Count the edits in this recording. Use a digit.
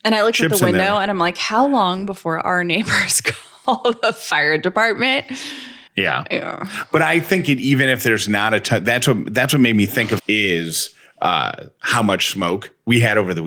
2